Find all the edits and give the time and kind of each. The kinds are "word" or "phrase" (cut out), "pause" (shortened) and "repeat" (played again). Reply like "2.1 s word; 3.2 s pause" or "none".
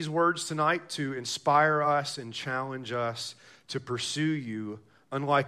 none